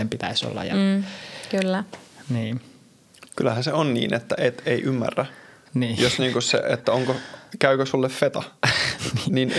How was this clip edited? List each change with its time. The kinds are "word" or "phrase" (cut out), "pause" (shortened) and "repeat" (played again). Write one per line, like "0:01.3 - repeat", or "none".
none